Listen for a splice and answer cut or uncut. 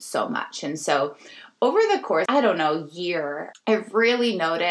cut